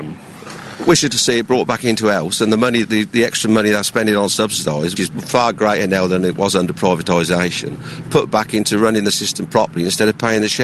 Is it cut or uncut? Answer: cut